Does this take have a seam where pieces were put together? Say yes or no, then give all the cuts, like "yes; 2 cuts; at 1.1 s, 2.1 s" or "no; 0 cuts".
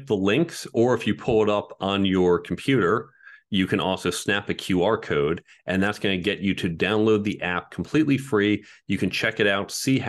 no; 0 cuts